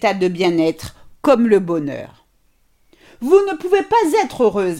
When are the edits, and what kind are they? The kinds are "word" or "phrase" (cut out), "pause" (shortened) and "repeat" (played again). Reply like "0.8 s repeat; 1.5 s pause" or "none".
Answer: none